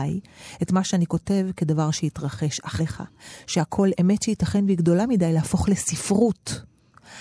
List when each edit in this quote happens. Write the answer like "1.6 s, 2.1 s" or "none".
2.8 s, 3.9 s